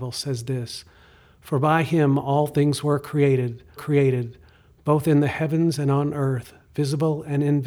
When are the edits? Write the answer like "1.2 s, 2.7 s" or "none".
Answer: 3.8 s